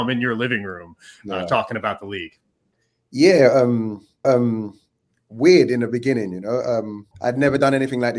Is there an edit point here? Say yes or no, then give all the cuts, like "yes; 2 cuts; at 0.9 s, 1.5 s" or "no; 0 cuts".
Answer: yes; 2 cuts; at 4.2 s, 7.1 s